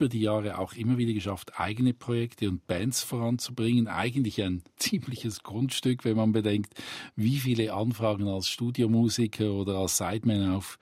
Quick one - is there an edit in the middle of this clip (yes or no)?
no